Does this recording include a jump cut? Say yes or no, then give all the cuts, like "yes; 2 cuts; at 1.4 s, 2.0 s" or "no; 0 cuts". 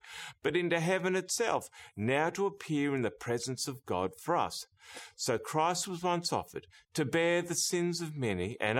no; 0 cuts